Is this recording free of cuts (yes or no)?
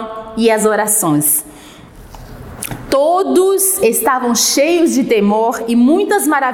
yes